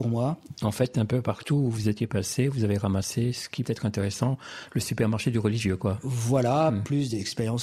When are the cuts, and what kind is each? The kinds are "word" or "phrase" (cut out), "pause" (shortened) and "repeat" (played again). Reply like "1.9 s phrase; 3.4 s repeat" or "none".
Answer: 3.6 s word